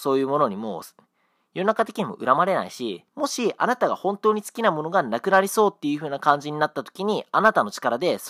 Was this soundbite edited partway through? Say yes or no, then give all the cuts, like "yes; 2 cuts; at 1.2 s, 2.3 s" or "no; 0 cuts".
yes; 1 cut; at 3.1 s